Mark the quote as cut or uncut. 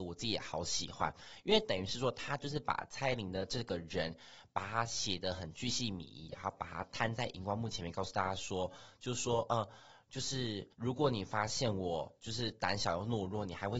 cut